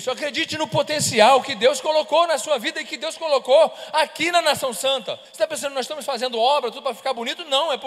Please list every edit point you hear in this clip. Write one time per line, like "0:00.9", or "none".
0:05.2